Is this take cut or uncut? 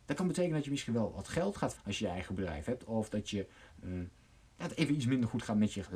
cut